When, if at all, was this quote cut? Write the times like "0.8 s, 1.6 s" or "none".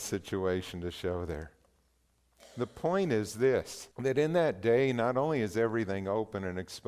3.9 s